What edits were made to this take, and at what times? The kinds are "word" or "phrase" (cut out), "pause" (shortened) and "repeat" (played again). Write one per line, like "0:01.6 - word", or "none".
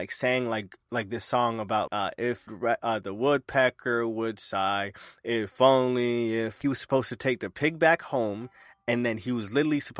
0:01.9 - word
0:02.5 - phrase
0:06.6 - phrase